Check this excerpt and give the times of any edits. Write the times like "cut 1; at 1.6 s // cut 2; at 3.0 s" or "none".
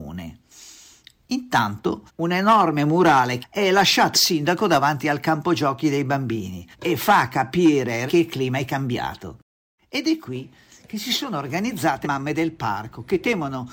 cut 1; at 2.1 s // cut 2; at 3.4 s // cut 3; at 4.1 s // cut 4; at 6.7 s // cut 5; at 8.1 s // cut 6; at 12.0 s